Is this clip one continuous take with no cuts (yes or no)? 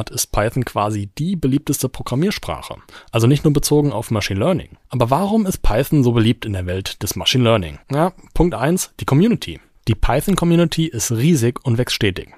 no